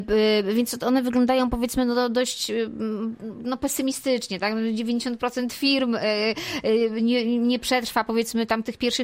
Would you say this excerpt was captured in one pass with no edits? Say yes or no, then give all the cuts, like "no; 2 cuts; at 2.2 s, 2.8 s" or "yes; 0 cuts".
yes; 0 cuts